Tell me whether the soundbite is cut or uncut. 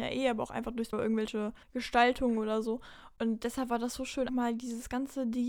cut